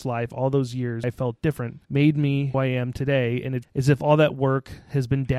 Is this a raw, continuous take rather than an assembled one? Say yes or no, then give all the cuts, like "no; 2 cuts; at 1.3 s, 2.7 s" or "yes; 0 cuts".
no; 4 cuts; at 1.0 s, 1.8 s, 2.5 s, 3.6 s